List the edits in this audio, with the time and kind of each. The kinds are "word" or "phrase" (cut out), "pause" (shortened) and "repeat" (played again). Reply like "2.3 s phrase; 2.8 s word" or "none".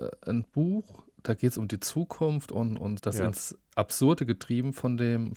3.0 s word